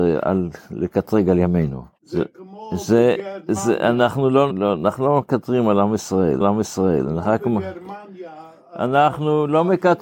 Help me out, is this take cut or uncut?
cut